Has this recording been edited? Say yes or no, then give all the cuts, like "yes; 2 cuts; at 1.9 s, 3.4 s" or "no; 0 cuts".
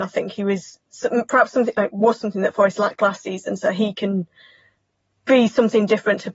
no; 0 cuts